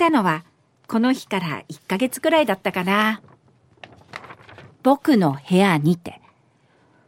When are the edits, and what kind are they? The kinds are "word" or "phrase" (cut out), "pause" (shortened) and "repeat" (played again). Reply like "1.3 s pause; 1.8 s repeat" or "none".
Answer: none